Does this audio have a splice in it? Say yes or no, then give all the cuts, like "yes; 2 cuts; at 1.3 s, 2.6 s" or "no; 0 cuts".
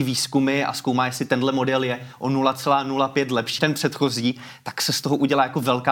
yes; 1 cut; at 3.6 s